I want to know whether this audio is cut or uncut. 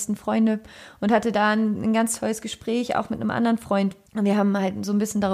cut